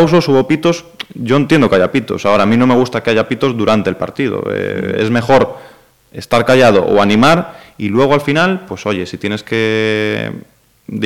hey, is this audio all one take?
yes; 0 cuts

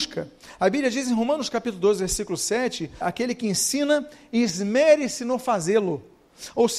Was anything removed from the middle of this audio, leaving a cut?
yes; 1 cut; at 3.0 s

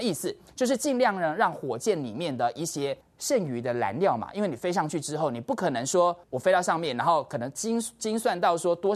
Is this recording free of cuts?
no; 2 cuts; at 3.0 s, 6.2 s

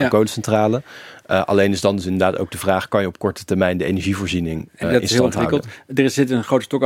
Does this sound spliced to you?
yes; 1 cut; at 4.8 s

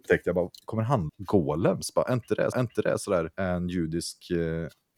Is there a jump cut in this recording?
yes; 3 cuts; at 1.1 s, 2.5 s, 3.3 s

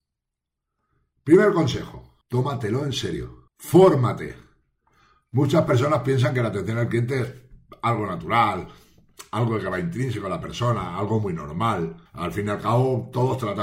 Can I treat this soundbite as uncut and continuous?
no; 3 cuts; at 2.2 s, 3.5 s, 12.1 s

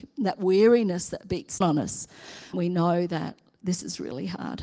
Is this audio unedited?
no; 2 cuts; at 1.6 s, 2.5 s

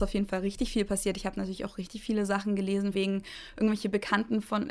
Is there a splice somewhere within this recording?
yes; 1 cut; at 2.9 s

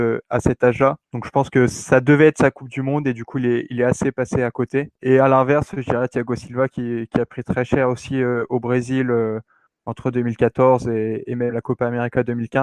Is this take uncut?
no; 1 cut; at 1.0 s

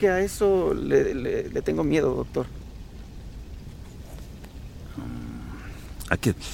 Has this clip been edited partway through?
no; 0 cuts

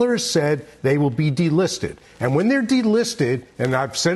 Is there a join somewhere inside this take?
no; 0 cuts

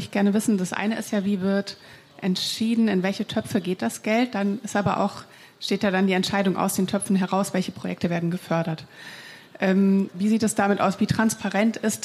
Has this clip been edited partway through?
no; 0 cuts

